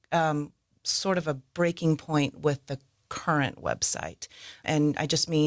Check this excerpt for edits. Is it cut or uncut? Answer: uncut